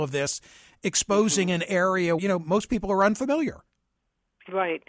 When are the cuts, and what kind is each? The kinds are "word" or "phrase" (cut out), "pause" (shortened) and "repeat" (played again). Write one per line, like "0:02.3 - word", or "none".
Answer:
0:02.2 - word